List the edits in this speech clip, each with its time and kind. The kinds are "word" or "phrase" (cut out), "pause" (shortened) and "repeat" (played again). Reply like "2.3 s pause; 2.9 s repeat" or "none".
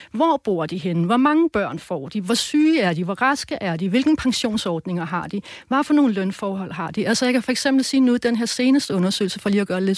none